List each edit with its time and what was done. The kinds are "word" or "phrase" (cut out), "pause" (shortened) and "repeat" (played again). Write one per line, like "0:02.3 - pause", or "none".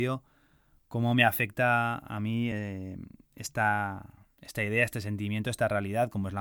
none